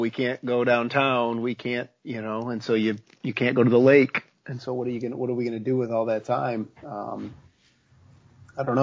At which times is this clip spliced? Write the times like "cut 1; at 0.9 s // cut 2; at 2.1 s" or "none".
none